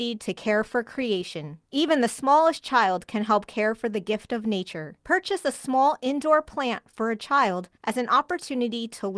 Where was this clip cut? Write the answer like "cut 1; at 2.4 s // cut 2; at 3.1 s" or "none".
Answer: cut 1; at 1.7 s // cut 2; at 5.0 s // cut 3; at 7.7 s